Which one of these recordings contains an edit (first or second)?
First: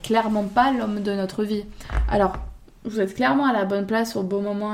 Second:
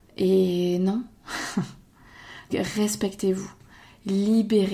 second